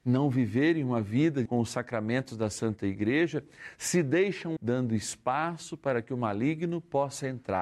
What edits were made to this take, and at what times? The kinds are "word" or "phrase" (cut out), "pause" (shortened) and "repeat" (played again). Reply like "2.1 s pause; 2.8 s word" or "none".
1.5 s word; 4.6 s word